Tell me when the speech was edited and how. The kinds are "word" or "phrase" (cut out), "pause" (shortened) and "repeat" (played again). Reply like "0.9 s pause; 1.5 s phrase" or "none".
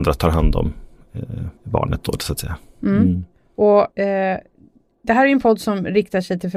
1.6 s pause; 3.9 s pause